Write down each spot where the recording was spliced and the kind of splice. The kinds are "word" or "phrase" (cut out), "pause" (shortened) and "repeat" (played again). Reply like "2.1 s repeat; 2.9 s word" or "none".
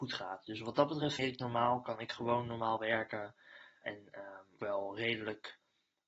1.2 s word; 3.8 s word; 4.6 s word